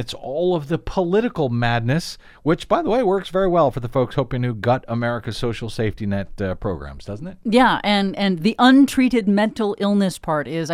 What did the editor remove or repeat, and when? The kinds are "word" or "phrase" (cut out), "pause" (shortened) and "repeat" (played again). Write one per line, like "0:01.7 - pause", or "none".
none

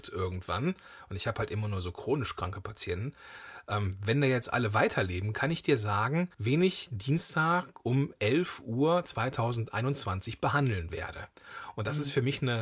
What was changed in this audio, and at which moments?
0:06.3 - pause

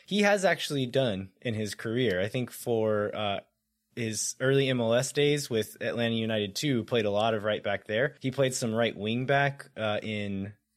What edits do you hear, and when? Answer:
0:08.2 - pause

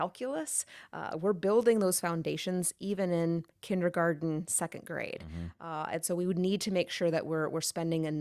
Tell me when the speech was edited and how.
none

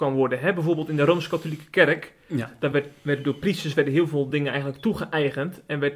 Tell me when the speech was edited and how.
none

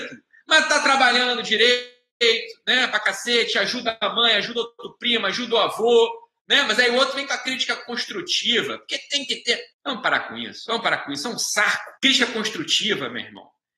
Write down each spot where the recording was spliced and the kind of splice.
0:06.4 - pause
0:09.7 - pause
0:12.0 - pause

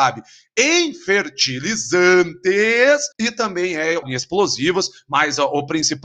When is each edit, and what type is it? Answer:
0:03.1 - pause
0:04.0 - word

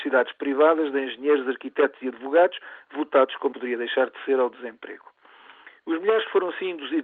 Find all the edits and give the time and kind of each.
0:03.5 - word

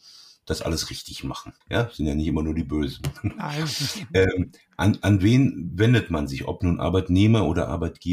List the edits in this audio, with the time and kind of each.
0:01.6 - pause

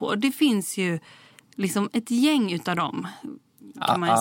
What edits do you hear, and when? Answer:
none

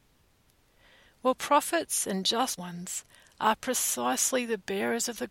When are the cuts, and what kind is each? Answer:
0:02.6 - phrase

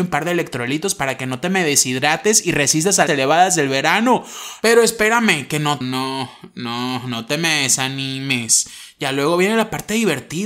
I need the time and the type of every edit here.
0:03.1 - phrase
0:05.8 - phrase

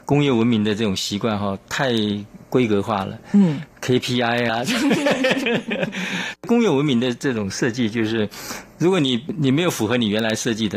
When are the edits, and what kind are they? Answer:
0:04.5 - phrase

